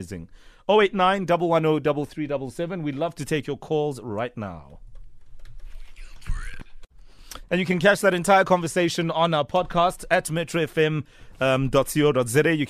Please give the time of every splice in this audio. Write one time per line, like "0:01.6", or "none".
none